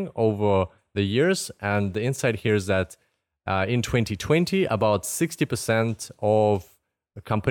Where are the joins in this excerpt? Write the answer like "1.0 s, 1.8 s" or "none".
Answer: none